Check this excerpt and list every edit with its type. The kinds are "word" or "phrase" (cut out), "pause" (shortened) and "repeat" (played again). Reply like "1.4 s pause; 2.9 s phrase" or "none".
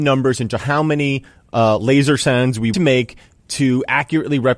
2.7 s phrase